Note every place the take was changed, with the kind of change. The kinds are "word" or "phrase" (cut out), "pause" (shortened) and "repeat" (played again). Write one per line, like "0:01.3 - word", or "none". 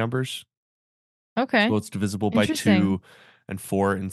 none